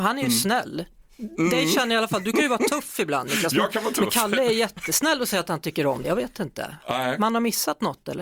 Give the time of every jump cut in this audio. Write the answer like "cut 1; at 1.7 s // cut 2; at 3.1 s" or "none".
cut 1; at 6.0 s